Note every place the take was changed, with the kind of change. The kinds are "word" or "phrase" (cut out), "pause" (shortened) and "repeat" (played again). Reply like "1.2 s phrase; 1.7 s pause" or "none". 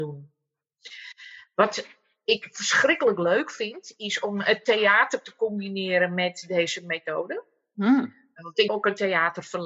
8.7 s word